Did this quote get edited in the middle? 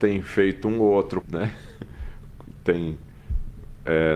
yes; 1 cut; at 1.2 s

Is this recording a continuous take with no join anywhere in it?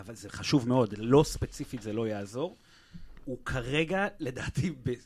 yes; 0 cuts

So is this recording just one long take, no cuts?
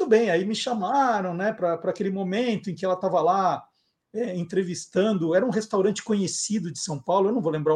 yes; 0 cuts

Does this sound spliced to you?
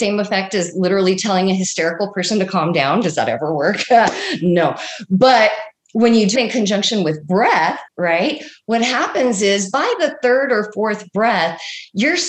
yes; 2 cuts; at 6.4 s, 7.9 s

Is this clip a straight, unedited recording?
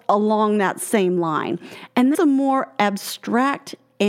no; 1 cut; at 2.1 s

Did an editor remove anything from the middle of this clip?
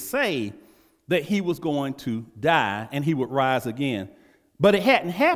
no; 0 cuts

